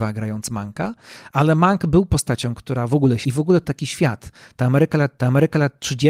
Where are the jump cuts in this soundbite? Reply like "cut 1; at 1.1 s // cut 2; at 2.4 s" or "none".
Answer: cut 1; at 3.2 s // cut 2; at 3.6 s // cut 3; at 5.2 s

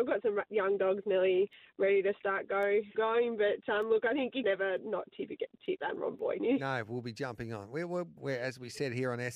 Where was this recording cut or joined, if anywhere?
cut 1; at 2.9 s // cut 2; at 4.4 s // cut 3; at 6.4 s // cut 4; at 8.2 s

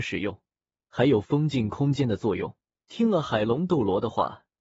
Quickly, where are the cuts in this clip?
cut 1; at 2.7 s

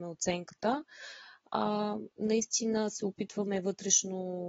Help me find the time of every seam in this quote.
cut 1; at 2.1 s

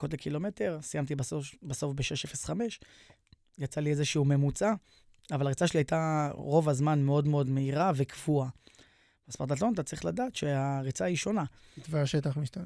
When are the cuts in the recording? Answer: none

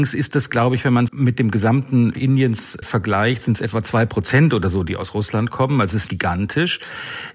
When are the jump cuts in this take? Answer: cut 1; at 1.1 s // cut 2; at 2.1 s // cut 3; at 2.8 s // cut 4; at 6.1 s

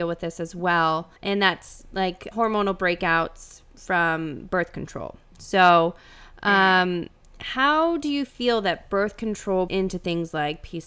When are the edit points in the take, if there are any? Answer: cut 1; at 1.2 s // cut 2; at 2.3 s // cut 3; at 7.2 s // cut 4; at 9.7 s

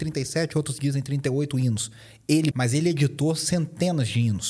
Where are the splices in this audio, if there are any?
cut 1; at 2.5 s

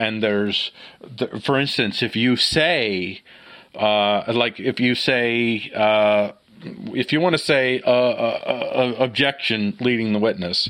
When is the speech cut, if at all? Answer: none

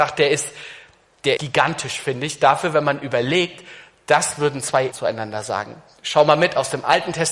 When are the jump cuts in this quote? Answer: cut 1; at 1.4 s // cut 2; at 4.9 s

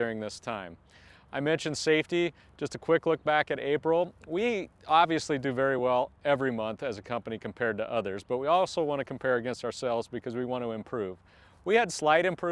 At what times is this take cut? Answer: none

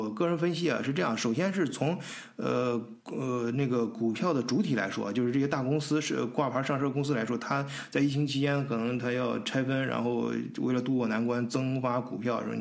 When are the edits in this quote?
cut 1; at 3.0 s

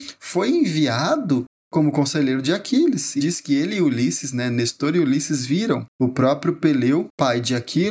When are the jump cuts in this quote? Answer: cut 1; at 3.2 s

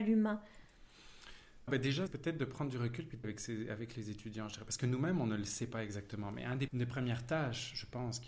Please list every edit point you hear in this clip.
cut 1; at 1.7 s // cut 2; at 2.1 s // cut 3; at 3.2 s // cut 4; at 6.7 s

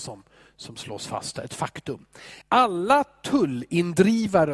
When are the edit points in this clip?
cut 1; at 2.4 s

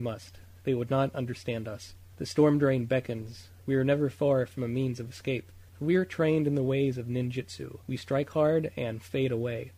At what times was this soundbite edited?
cut 1; at 2.1 s // cut 2; at 5.7 s // cut 3; at 7.8 s

